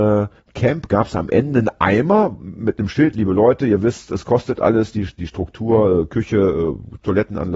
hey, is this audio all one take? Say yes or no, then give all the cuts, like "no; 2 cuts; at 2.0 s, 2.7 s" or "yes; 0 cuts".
yes; 0 cuts